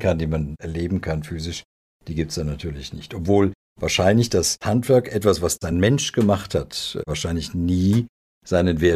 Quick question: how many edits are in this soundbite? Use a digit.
0